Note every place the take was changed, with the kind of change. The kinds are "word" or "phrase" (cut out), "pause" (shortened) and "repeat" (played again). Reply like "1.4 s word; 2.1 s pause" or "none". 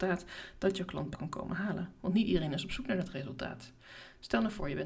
1.1 s word